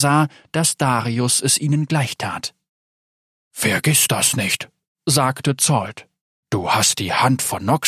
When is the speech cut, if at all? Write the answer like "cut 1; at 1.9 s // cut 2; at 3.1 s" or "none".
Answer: none